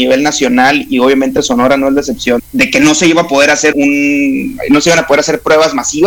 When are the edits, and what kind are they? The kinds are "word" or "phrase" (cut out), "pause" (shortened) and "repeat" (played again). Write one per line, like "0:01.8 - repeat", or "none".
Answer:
0:02.4 - word
0:03.7 - word